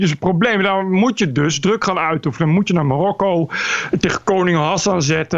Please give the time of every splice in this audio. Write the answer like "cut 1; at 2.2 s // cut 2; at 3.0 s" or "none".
none